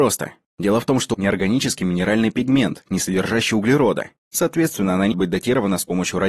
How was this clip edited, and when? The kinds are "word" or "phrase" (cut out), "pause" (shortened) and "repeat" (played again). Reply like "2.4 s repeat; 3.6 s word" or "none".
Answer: 1.1 s word; 5.1 s word